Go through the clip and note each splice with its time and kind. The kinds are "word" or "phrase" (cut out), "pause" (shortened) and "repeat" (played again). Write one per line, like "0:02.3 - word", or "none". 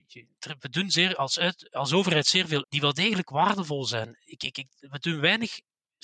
0:02.6 - word